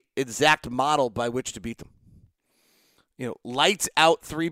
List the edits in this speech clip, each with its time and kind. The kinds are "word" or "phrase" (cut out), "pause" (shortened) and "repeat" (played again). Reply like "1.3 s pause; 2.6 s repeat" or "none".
none